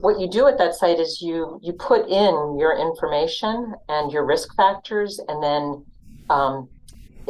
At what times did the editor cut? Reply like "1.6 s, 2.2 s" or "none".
none